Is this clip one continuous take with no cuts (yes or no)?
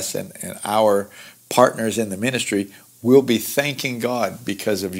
yes